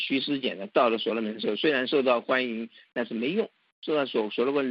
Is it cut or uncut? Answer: uncut